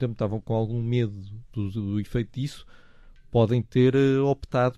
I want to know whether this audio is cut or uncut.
uncut